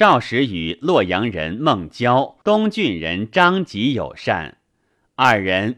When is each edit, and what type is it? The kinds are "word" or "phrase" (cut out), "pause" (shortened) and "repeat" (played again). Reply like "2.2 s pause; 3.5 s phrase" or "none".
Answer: 2.4 s pause